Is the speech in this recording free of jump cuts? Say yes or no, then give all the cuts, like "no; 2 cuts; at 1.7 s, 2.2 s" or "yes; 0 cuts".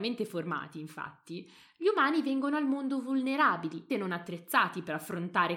no; 1 cut; at 3.9 s